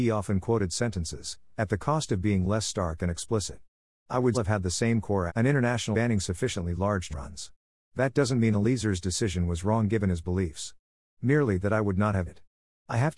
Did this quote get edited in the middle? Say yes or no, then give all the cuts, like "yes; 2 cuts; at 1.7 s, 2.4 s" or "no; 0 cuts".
yes; 5 cuts; at 4.3 s, 5.3 s, 5.9 s, 7.1 s, 12.3 s